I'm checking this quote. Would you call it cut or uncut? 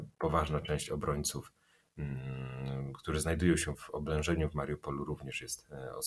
cut